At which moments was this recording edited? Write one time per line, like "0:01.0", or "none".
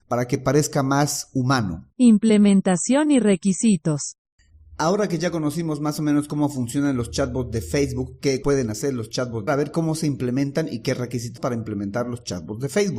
0:01.9
0:08.4
0:09.5
0:11.4